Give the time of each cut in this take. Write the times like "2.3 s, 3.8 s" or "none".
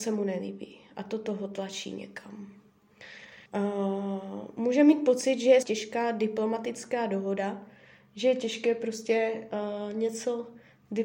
3.5 s, 5.6 s

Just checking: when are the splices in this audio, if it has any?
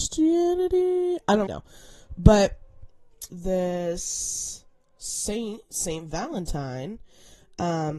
1.5 s, 3.3 s

